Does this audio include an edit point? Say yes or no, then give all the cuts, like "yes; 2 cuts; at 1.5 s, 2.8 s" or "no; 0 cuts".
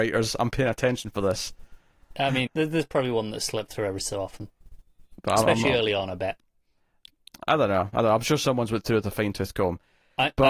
yes; 1 cut; at 2.5 s